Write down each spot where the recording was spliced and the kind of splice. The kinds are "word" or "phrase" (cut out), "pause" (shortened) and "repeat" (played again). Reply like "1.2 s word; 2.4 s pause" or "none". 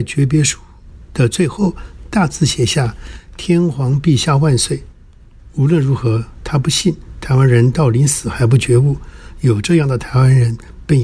4.9 s pause